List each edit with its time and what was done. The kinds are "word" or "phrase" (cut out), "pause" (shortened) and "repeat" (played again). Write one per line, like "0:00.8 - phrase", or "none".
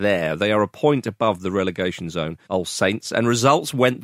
0:02.4 - pause

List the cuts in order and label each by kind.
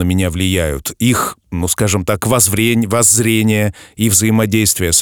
none

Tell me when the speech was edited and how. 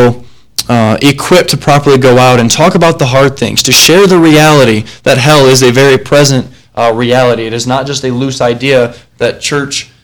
none

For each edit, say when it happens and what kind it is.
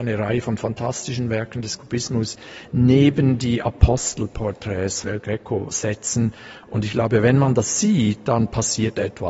0:05.0 - word

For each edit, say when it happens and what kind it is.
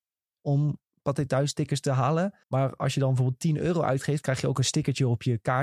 0:02.4 - pause

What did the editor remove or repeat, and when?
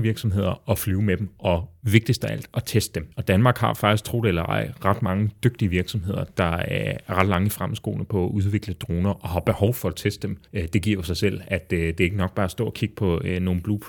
0:03.1 - pause
0:10.5 - pause

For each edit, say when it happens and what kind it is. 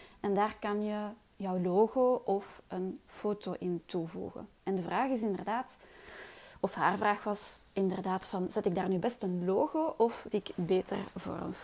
0:07.7 - pause
0:10.3 - word

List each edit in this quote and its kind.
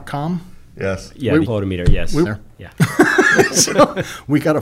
0:01.4 - word
0:02.2 - phrase

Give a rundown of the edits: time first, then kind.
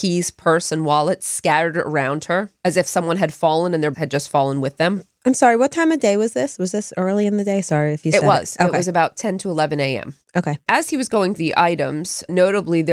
0:03.9 - word
0:11.4 - word

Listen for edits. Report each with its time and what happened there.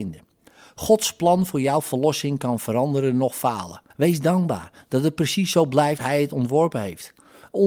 0:03.9 - pause
0:06.0 - word

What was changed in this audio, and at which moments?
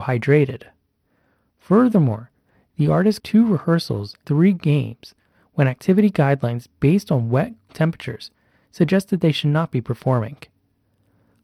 0:03.2 - word
0:04.2 - word
0:07.7 - word

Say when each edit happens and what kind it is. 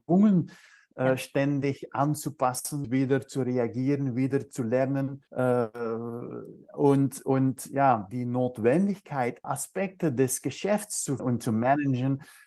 0:02.8 - word
0:05.3 - pause
0:08.1 - phrase
0:09.4 - word
0:11.2 - word

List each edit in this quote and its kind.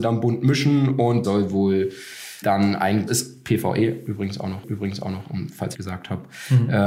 0:01.2 - word
0:02.4 - word
0:03.1 - word
0:04.6 - repeat
0:05.7 - phrase

